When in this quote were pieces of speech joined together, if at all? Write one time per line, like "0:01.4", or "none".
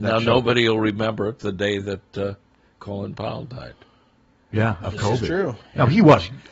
0:01.4